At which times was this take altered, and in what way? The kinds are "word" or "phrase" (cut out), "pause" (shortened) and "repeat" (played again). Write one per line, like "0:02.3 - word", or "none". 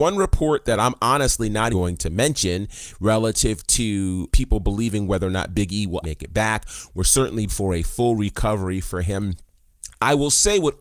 0:01.7 - word
0:04.3 - word
0:06.0 - word
0:07.5 - word